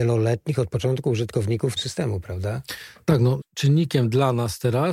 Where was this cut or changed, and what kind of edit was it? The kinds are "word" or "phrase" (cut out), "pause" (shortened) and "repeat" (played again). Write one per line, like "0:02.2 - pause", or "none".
0:01.8 - word
0:03.4 - word